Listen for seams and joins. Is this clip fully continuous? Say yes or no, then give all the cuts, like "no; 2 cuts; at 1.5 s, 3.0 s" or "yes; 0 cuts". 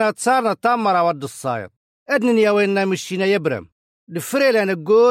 yes; 0 cuts